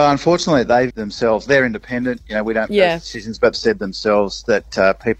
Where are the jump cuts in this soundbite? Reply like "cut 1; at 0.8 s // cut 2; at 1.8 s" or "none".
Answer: cut 1; at 0.9 s // cut 2; at 2.7 s // cut 3; at 3.5 s